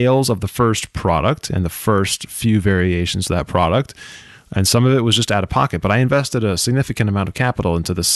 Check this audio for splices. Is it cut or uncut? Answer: uncut